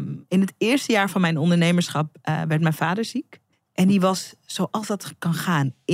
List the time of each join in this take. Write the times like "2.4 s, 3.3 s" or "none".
3.5 s